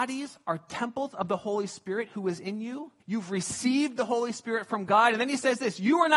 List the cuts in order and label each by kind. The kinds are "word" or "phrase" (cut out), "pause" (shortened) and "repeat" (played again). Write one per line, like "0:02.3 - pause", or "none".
0:03.0 - pause